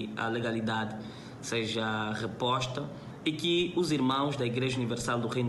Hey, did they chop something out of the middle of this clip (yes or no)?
no